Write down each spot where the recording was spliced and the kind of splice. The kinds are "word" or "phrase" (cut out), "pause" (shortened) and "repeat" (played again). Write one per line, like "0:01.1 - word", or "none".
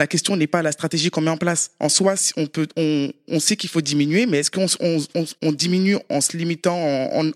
0:05.4 - pause